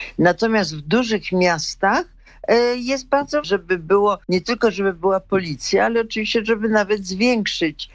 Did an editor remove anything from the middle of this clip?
yes; 2 cuts; at 3.4 s, 4.2 s

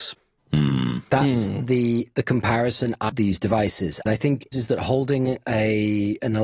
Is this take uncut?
no; 3 cuts; at 3.1 s, 4.1 s, 4.5 s

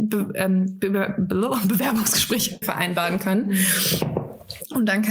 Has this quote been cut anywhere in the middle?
yes; 1 cut; at 2.6 s

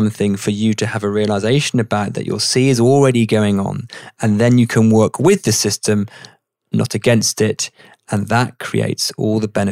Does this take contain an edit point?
no; 0 cuts

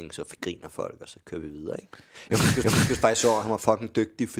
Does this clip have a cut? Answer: yes; 1 cut; at 2.6 s

